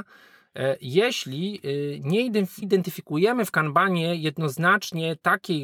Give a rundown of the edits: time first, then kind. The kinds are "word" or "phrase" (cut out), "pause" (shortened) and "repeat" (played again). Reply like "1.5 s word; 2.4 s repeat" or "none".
2.6 s word